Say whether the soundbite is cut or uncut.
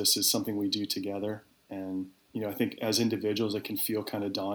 cut